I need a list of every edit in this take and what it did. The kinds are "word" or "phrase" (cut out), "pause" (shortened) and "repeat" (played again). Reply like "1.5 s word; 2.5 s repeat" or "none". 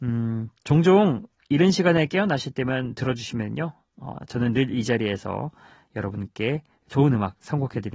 none